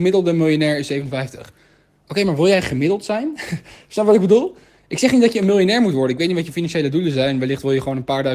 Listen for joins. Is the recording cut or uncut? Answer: uncut